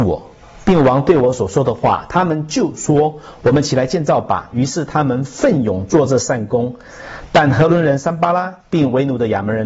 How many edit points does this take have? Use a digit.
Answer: 1